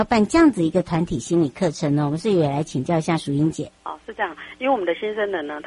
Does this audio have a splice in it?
yes; 1 cut; at 3.7 s

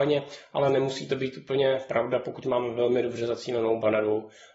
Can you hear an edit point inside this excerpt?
no; 0 cuts

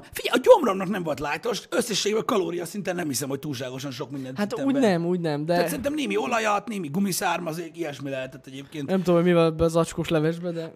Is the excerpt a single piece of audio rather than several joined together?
yes; 0 cuts

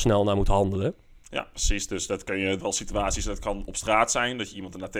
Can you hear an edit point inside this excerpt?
yes; 1 cut; at 2.6 s

